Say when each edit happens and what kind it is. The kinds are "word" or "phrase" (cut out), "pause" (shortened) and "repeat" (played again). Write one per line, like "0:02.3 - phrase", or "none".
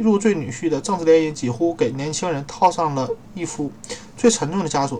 0:03.2 - pause